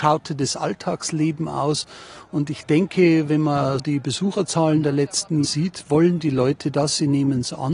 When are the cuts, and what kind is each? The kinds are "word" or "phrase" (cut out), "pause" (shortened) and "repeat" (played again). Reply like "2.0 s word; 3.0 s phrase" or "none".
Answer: 3.8 s word; 5.4 s word